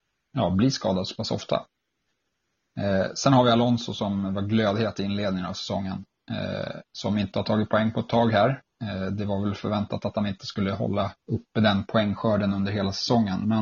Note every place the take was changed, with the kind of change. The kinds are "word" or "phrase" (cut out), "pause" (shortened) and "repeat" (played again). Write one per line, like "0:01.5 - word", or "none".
0:11.2 - pause